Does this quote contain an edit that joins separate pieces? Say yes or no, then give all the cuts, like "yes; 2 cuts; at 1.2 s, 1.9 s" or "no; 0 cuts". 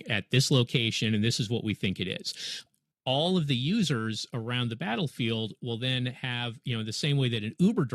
no; 0 cuts